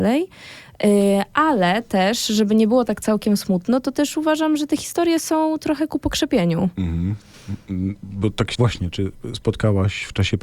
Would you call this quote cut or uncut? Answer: cut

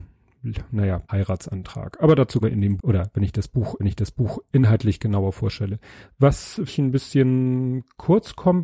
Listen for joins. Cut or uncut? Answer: cut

